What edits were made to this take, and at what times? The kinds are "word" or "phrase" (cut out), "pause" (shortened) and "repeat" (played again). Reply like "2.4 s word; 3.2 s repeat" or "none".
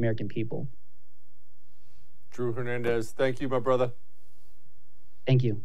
none